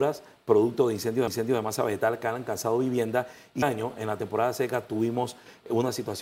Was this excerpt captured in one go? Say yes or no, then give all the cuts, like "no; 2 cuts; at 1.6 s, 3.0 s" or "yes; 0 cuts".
no; 2 cuts; at 1.3 s, 3.6 s